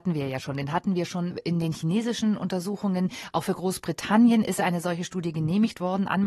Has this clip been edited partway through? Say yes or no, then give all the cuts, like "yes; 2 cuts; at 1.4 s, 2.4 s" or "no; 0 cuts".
no; 0 cuts